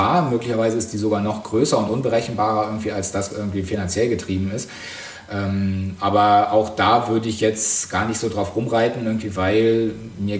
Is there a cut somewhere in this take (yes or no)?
yes